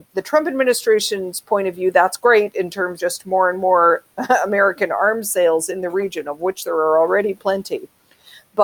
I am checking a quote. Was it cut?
yes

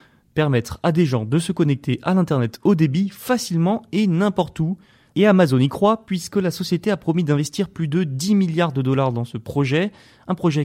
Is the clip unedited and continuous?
yes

